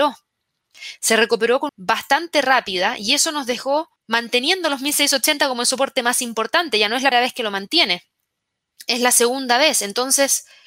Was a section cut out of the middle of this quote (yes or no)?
yes